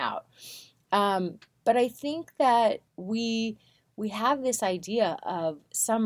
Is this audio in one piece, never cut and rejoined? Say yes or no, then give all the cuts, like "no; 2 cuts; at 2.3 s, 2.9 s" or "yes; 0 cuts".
no; 1 cut; at 2.9 s